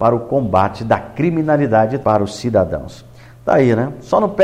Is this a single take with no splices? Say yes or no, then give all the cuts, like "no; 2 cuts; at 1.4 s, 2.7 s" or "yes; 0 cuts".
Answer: no; 1 cut; at 2.0 s